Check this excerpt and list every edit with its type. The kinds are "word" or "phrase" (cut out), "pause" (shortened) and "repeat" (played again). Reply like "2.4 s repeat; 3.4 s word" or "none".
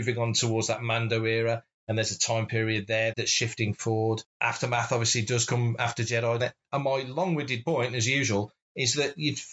3.1 s word; 6.4 s word